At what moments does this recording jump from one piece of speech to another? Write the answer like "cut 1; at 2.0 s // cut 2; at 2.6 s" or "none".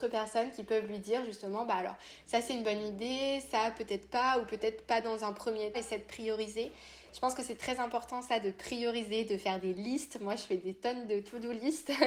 cut 1; at 5.7 s